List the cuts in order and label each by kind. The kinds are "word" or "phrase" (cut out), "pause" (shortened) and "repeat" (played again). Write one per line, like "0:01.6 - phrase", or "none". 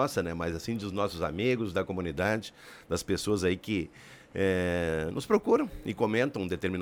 none